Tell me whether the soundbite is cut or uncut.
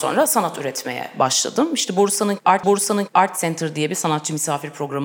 cut